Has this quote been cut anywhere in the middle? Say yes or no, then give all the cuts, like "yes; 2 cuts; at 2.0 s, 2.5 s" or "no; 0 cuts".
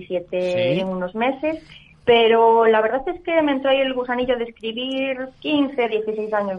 no; 0 cuts